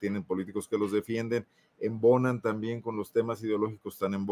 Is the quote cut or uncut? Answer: uncut